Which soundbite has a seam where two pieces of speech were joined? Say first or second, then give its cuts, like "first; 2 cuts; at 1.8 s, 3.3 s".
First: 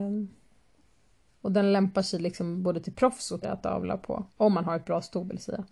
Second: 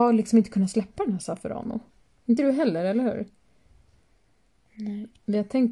first; 2 cuts; at 3.4 s, 4.3 s